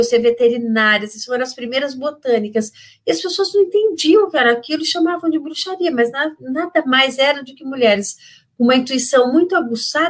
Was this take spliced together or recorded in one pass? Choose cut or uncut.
uncut